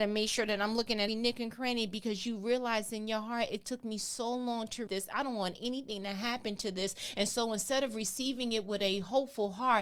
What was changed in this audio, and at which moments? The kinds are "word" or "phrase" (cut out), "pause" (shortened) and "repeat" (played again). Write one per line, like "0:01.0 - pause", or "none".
0:01.1 - word
0:04.9 - word